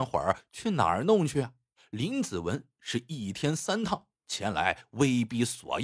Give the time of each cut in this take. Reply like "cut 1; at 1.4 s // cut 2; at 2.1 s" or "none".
cut 1; at 1.7 s